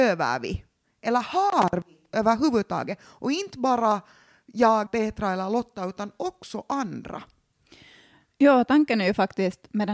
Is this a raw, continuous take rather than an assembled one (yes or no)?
no